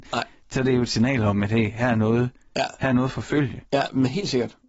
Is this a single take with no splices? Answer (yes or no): yes